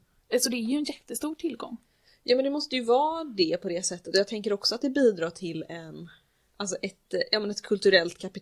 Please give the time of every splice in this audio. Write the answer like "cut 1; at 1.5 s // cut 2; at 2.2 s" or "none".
none